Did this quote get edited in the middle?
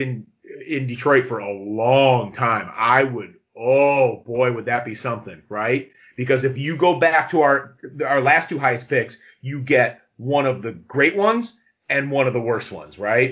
no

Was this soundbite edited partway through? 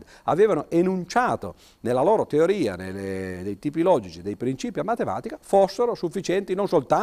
no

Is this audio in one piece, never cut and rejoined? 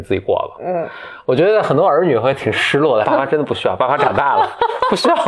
no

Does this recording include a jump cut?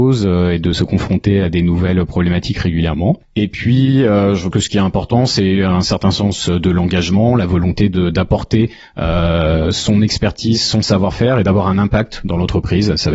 yes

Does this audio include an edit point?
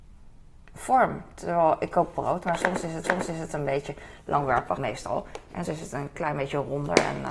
yes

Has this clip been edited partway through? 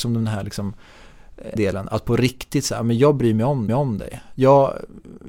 yes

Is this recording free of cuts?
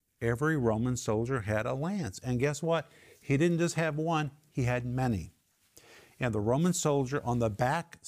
yes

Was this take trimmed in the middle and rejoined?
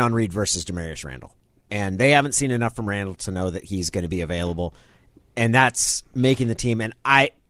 no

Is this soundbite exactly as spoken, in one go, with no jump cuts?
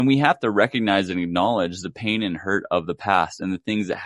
yes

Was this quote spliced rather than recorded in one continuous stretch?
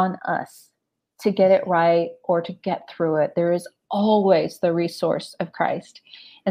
no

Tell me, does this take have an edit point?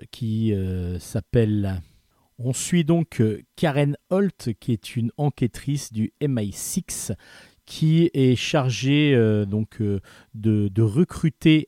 no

